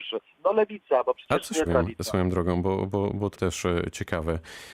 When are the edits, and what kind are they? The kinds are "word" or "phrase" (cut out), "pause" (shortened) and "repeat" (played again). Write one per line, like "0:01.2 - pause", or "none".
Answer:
0:01.7 - phrase
0:03.4 - phrase